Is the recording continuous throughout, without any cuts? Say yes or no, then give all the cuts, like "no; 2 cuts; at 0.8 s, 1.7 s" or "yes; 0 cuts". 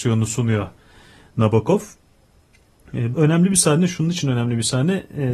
no; 1 cut; at 3.1 s